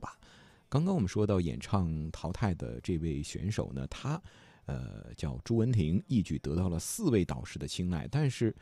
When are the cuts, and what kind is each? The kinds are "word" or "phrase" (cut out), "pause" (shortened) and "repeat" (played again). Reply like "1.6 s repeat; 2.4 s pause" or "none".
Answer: none